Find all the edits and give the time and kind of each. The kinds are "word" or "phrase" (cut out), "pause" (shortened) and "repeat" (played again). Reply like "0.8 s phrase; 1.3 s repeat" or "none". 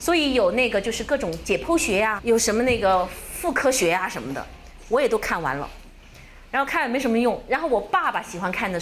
2.2 s word

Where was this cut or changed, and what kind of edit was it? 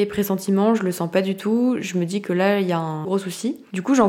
3.0 s word

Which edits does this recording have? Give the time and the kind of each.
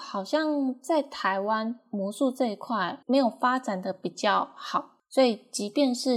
3.0 s pause

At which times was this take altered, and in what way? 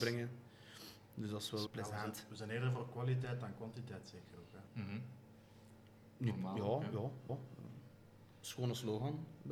1.7 s word; 4.7 s pause; 7.3 s repeat

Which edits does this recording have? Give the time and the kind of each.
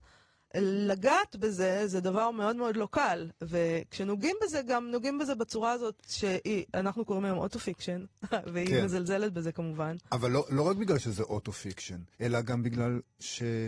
12.1 s pause

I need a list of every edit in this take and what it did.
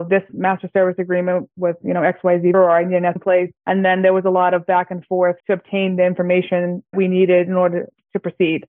2.5 s word; 3.2 s word; 3.6 s pause; 5.4 s pause; 6.9 s word

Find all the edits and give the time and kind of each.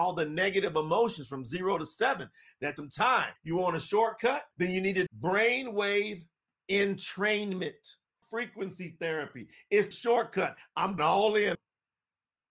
2.8 s word; 3.4 s pause; 4.5 s pause; 5.1 s word; 8.2 s word; 9.9 s word; 11.0 s word; 11.5 s word

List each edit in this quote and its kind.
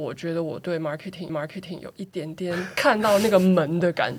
1.3 s repeat

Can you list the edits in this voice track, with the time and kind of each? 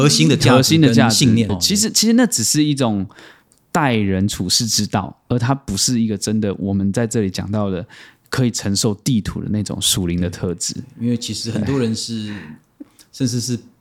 1.5 s word

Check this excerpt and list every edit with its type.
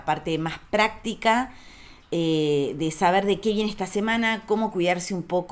none

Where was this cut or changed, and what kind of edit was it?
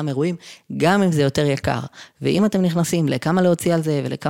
none

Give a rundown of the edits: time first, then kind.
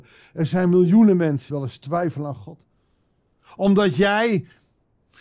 1.5 s word

